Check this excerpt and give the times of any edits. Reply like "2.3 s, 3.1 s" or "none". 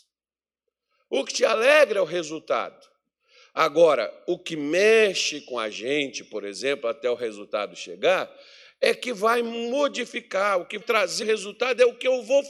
10.8 s, 11.2 s